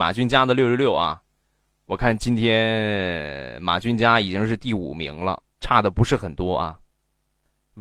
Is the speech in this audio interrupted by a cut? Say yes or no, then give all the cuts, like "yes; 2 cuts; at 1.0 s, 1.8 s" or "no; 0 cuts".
yes; 1 cut; at 5.5 s